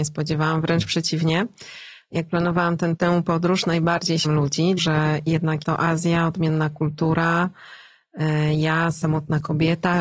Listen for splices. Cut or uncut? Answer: cut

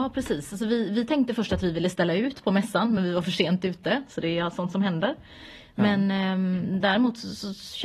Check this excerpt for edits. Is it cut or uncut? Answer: uncut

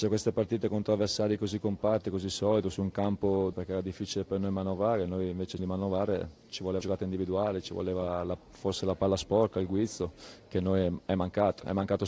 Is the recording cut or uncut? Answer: cut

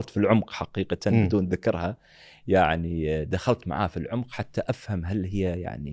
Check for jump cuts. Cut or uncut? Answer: uncut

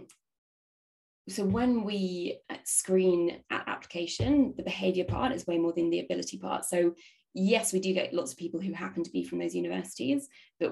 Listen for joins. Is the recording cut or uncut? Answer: uncut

